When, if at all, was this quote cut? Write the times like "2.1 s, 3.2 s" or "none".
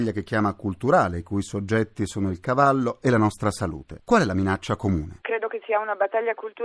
none